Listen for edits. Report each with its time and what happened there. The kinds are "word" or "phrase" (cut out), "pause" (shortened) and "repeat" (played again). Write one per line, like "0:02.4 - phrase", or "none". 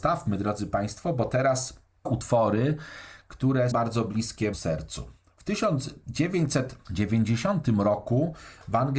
0:02.1 - word
0:03.7 - word
0:04.5 - word